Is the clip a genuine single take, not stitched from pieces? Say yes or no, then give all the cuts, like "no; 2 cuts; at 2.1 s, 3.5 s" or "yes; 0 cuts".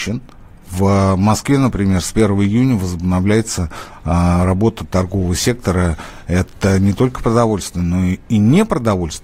yes; 0 cuts